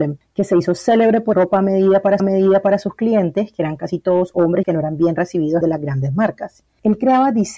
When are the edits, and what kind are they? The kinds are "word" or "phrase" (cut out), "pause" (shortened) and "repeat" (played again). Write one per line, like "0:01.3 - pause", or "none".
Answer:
0:01.3 - word
0:02.2 - repeat
0:04.6 - phrase
0:05.6 - phrase